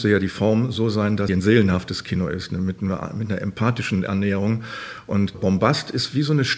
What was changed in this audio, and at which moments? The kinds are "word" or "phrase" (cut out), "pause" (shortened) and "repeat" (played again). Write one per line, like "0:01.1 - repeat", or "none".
0:01.3 - phrase
0:05.3 - word